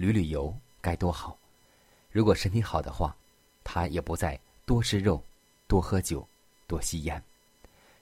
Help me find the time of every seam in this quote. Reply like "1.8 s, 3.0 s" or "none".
none